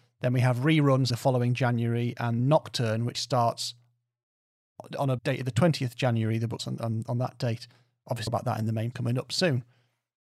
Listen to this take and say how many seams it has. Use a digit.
7